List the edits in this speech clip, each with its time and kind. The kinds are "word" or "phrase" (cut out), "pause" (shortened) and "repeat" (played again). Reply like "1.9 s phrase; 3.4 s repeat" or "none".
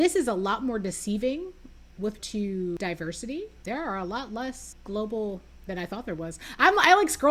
2.2 s word; 3.6 s word; 5.5 s word